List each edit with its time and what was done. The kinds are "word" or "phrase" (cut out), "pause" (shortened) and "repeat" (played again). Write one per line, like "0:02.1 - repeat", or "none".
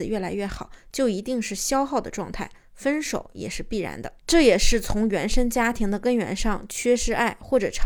0:04.2 - pause